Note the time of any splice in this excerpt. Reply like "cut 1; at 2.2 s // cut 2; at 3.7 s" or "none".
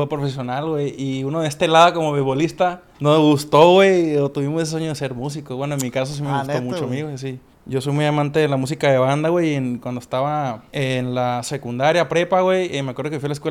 cut 1; at 2.9 s // cut 2; at 7.5 s // cut 3; at 10.7 s